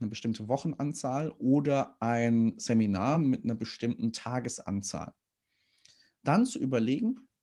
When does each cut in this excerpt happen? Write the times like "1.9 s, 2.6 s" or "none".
none